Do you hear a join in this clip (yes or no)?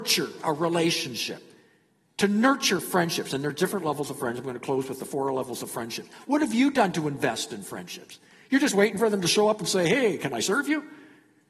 no